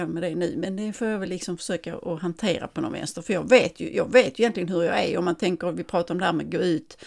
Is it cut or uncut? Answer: uncut